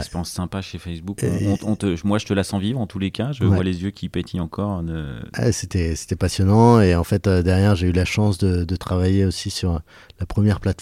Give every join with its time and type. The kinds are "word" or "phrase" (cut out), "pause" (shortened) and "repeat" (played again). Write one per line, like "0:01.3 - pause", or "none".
none